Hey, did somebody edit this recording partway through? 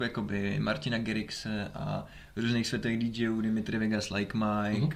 no; 0 cuts

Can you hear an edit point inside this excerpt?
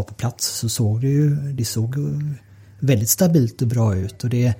no; 0 cuts

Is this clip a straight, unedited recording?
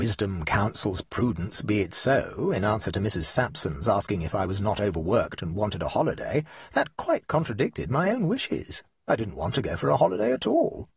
yes; 0 cuts

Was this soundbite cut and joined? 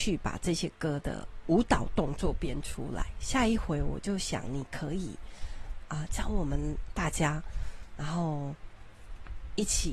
yes; 1 cut; at 6.1 s

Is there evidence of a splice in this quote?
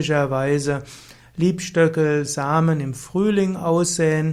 no; 0 cuts

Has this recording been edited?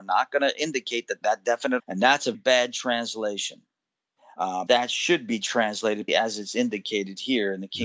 yes; 5 cuts; at 1.2 s, 1.8 s, 2.3 s, 4.7 s, 6.1 s

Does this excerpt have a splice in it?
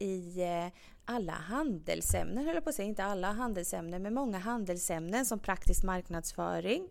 no; 0 cuts

